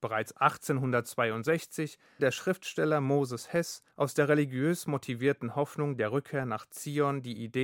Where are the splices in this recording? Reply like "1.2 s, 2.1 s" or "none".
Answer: 2.2 s, 3.9 s